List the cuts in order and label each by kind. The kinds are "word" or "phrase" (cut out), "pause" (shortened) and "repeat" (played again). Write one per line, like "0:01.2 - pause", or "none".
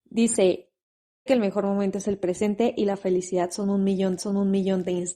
0:01.3 - word
0:04.2 - repeat

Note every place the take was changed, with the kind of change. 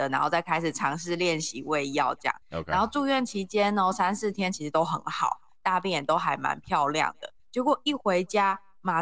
0:02.4 - pause
0:07.4 - pause

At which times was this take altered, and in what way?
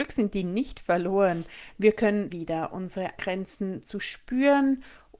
0:02.3 - word
0:03.2 - word

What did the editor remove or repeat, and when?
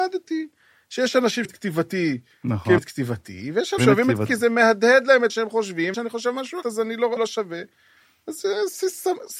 0:01.4 - word
0:02.8 - word
0:03.8 - word
0:04.3 - word
0:05.3 - word
0:05.9 - word
0:06.6 - word
0:07.2 - word

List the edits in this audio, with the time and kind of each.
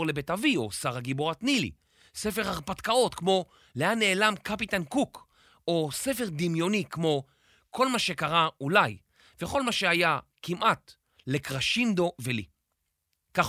none

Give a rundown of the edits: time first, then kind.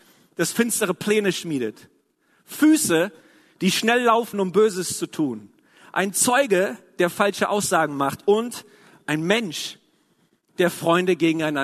none

